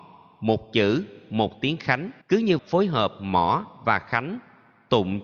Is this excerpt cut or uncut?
cut